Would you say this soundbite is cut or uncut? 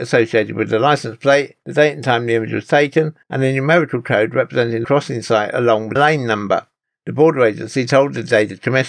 cut